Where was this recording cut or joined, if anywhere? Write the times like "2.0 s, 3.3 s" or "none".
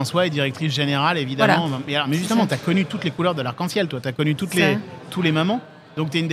none